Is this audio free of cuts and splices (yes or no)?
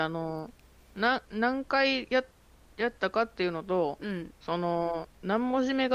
no